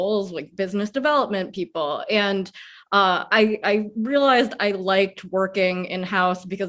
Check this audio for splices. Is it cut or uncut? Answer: uncut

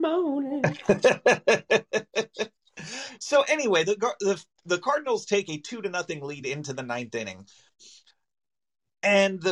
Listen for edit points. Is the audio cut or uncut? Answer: uncut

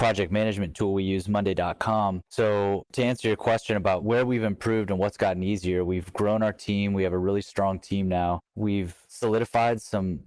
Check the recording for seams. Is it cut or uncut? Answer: cut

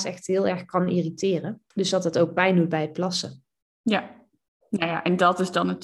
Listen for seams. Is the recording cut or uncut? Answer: cut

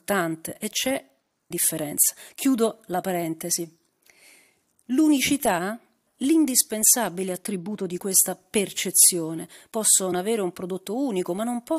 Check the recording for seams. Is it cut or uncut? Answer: cut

